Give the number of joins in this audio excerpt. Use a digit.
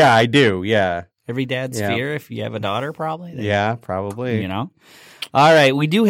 0